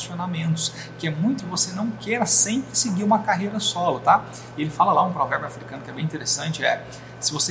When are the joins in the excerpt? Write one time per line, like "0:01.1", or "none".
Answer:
0:01.4